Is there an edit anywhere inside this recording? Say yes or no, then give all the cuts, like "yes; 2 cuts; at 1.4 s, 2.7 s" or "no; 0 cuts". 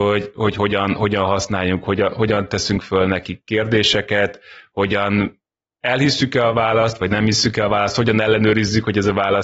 no; 0 cuts